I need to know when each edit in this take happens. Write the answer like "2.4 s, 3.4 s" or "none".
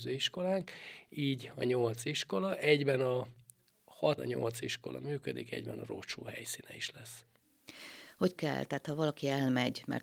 4.2 s, 8.4 s